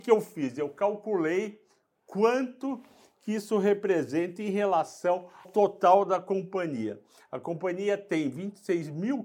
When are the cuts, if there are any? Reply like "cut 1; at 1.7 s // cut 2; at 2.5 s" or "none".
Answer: cut 1; at 5.4 s